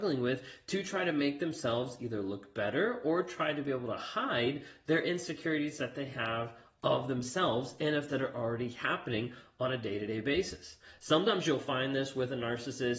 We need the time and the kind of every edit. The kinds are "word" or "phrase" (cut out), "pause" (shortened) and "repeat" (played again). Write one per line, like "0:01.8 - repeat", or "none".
0:08.1 - word